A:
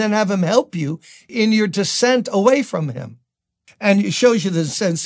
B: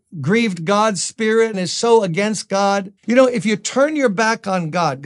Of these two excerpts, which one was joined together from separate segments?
B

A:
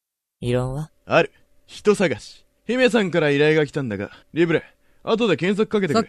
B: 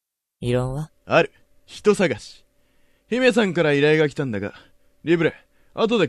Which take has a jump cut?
A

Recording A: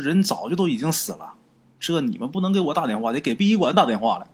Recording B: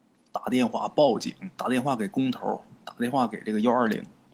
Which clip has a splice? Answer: B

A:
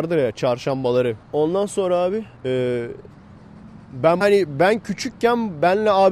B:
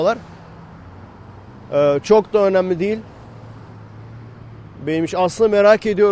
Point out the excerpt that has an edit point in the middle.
A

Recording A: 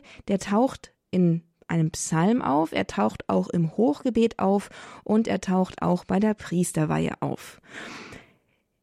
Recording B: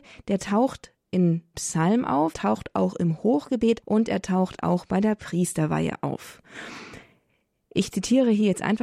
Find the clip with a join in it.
B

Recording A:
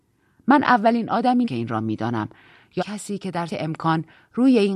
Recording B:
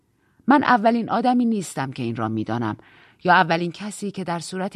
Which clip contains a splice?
A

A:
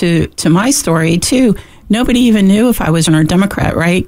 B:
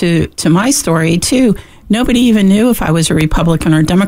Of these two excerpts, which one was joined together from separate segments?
A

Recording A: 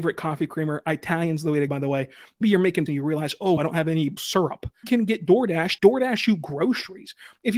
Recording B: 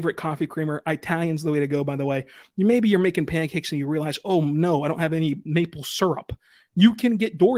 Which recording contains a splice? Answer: A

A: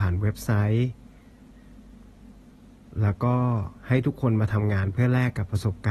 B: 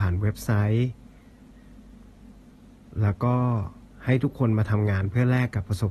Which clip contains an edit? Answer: A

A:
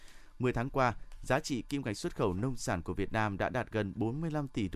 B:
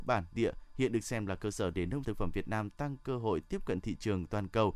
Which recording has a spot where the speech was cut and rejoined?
B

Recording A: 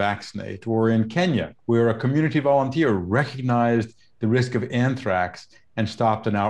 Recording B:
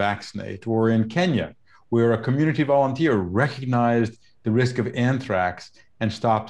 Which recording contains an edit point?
A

